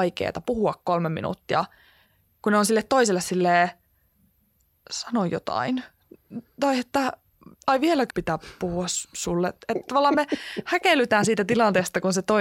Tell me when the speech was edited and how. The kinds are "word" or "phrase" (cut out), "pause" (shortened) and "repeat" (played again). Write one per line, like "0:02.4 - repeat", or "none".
0:08.1 - word